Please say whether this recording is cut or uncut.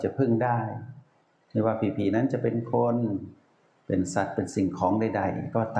uncut